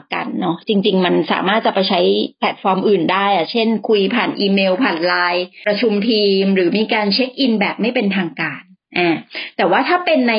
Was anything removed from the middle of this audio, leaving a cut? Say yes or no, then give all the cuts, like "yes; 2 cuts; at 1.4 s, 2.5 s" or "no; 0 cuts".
no; 0 cuts